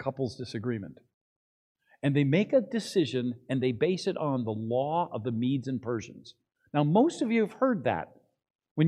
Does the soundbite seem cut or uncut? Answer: uncut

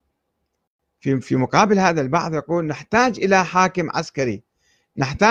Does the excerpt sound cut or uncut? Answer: uncut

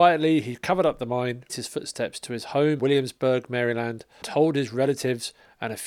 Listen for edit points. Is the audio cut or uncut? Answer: cut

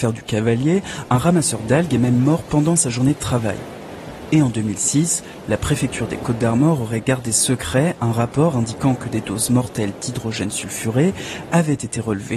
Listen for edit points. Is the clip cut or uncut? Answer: uncut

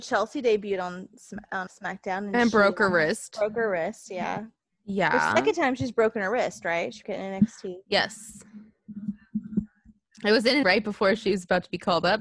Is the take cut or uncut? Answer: cut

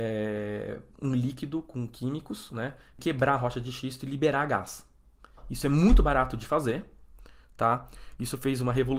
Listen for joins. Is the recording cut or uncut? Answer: cut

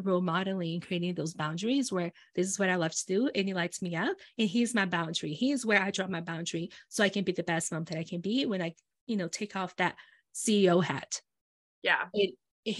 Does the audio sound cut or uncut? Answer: uncut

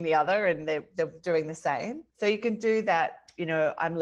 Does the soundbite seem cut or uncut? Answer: cut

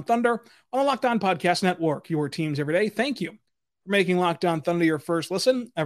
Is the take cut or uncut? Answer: uncut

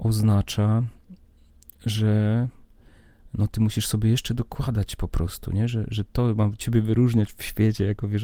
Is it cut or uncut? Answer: uncut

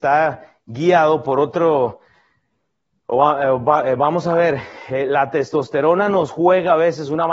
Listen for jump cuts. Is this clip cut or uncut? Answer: uncut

